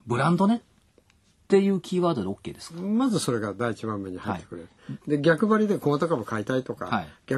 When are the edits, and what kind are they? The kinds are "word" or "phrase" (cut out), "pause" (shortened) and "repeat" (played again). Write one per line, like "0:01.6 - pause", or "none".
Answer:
none